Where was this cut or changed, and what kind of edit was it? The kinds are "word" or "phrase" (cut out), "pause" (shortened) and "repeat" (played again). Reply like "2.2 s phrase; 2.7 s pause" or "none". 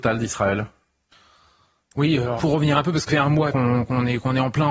2.4 s word; 3.1 s word; 3.5 s word